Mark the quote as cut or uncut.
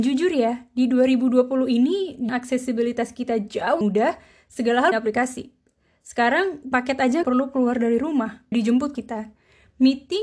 cut